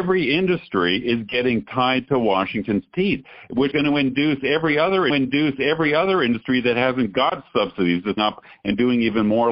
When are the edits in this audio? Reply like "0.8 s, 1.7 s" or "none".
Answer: 3.7 s, 5.1 s, 8.2 s